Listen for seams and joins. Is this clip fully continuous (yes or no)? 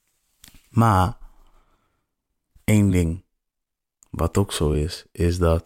yes